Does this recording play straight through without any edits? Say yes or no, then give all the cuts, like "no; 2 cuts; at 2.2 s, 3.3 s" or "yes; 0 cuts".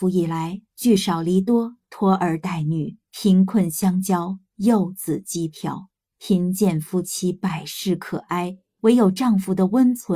no; 1 cut; at 3.0 s